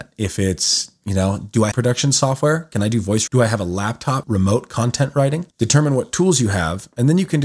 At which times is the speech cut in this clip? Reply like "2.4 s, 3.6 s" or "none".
1.7 s, 3.3 s, 4.2 s, 5.5 s